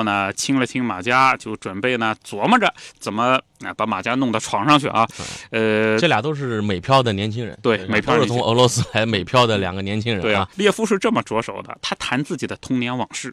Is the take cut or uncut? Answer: cut